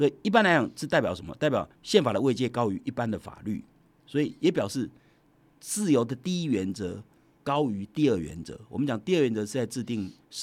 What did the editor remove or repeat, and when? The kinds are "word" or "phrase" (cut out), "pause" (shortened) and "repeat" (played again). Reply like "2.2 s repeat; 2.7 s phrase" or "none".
1.8 s pause